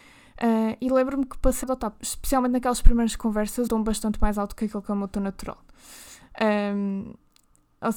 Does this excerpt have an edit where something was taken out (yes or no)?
yes